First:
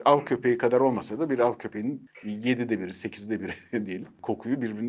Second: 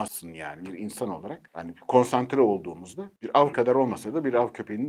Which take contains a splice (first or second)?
second